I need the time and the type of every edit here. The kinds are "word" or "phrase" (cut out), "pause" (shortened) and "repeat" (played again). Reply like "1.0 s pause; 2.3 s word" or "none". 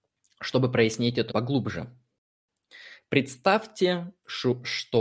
1.3 s word